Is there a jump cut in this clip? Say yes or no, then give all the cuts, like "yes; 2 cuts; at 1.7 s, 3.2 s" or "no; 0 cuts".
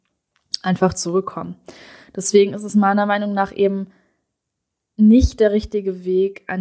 no; 0 cuts